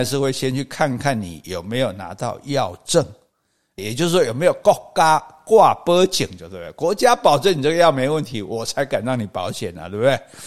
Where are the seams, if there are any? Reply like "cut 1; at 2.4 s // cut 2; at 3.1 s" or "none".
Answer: cut 1; at 3.8 s